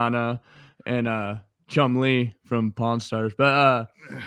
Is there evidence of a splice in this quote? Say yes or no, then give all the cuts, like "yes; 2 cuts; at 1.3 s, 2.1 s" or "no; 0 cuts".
no; 0 cuts